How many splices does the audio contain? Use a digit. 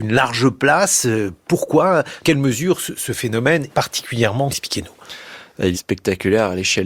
4